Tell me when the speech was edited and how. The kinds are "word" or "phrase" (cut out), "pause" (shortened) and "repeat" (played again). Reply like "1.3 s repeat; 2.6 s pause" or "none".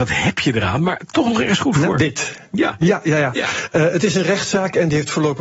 none